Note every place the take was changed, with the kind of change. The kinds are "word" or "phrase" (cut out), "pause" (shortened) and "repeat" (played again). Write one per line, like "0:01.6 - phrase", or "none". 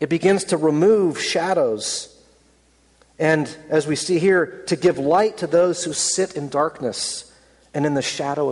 none